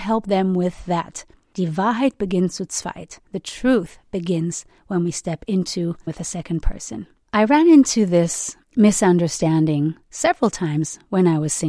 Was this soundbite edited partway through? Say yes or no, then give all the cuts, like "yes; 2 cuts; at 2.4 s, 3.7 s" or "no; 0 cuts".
yes; 4 cuts; at 3.3 s, 6.1 s, 7.2 s, 8.6 s